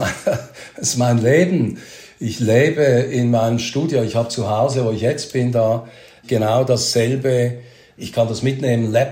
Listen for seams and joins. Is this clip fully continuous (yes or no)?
yes